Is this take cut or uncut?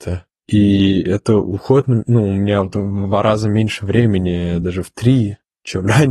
uncut